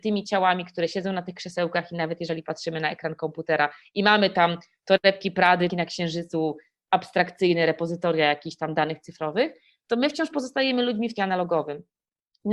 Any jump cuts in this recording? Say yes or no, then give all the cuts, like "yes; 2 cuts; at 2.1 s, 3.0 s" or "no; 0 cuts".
yes; 2 cuts; at 5.7 s, 11.2 s